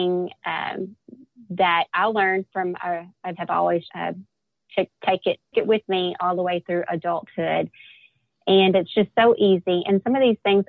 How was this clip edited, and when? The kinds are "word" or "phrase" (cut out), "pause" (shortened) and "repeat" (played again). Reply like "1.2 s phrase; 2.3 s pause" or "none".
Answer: 1.9 s pause; 3.3 s phrase; 3.9 s word; 5.5 s word